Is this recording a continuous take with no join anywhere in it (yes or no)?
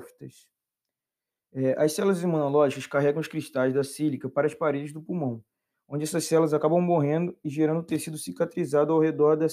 yes